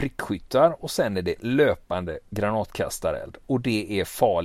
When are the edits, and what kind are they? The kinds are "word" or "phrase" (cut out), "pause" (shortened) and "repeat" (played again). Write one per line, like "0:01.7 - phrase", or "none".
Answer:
none